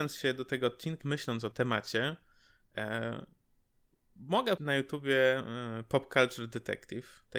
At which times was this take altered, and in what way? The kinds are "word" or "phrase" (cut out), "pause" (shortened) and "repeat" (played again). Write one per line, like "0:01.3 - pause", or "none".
0:01.0 - word
0:01.5 - word
0:04.6 - word